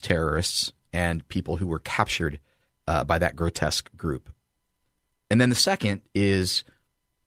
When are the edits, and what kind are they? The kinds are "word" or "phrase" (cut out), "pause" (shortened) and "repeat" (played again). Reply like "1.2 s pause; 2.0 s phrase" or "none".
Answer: none